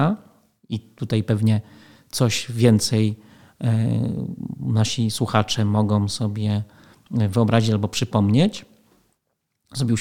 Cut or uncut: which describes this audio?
uncut